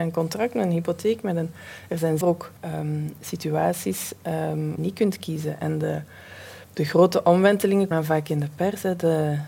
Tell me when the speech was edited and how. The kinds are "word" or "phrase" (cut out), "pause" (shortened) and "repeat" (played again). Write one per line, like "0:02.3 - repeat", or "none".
0:02.2 - word
0:02.6 - pause
0:04.8 - phrase
0:06.6 - pause
0:07.9 - word